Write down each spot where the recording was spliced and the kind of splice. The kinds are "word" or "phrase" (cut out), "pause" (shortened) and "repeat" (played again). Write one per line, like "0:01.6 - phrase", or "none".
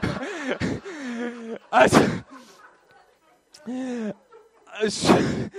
none